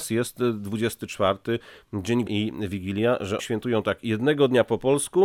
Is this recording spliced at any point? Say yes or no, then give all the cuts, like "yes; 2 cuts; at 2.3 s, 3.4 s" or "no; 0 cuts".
yes; 2 cuts; at 2.3 s, 3.4 s